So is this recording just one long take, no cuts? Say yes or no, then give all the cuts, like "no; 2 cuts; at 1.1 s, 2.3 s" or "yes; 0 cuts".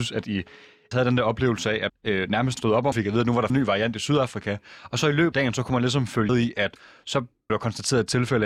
no; 8 cuts; at 0.9 s, 1.9 s, 2.6 s, 2.9 s, 3.5 s, 5.3 s, 6.3 s, 7.5 s